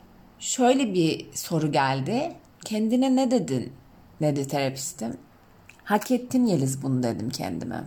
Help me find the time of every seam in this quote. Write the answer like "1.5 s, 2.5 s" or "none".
2.5 s, 3.9 s, 5.3 s